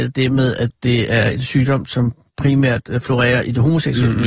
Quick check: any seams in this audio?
no; 0 cuts

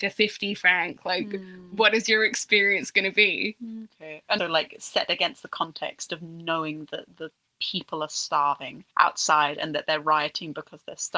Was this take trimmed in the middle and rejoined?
yes; 2 cuts; at 4.4 s, 8.9 s

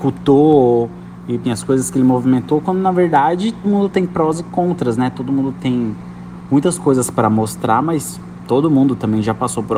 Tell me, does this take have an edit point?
yes; 2 cuts; at 1.4 s, 3.6 s

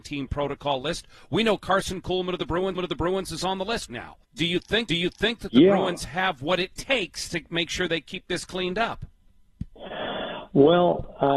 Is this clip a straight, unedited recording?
no; 4 cuts; at 2.8 s, 3.9 s, 4.2 s, 4.9 s

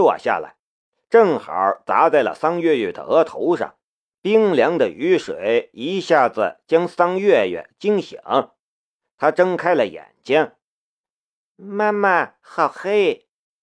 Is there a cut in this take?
yes; 2 cuts; at 4.1 s, 12.4 s

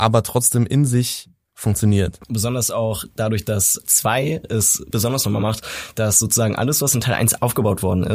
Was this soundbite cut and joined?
yes; 3 cuts; at 2.2 s, 3.8 s, 4.9 s

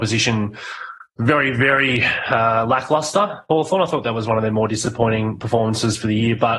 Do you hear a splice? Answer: yes; 1 cut; at 1.1 s

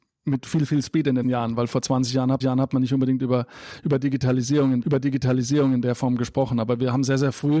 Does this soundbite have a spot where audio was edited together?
yes; 3 cuts; at 1.2 s, 2.4 s, 4.8 s

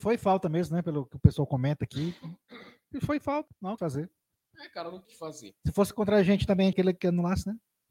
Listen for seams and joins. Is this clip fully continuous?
no; 4 cuts; at 3.5 s, 3.8 s, 5.0 s, 6.7 s

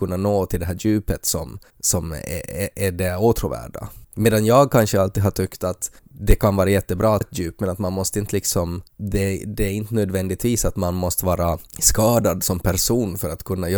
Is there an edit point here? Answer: yes; 7 cuts; at 1.7 s, 2.7 s, 4.0 s, 6.0 s, 7.2 s, 8.9 s, 11.7 s

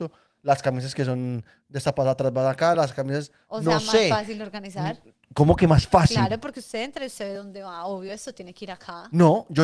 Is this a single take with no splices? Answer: yes; 0 cuts

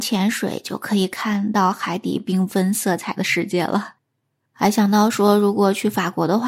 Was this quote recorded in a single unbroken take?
yes; 0 cuts

